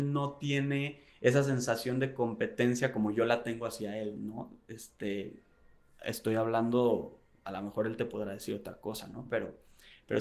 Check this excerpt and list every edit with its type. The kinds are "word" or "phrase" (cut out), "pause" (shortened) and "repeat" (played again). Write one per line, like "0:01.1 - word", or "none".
none